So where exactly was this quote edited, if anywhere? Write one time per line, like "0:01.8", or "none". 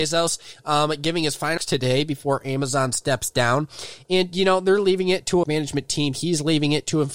0:01.6
0:05.4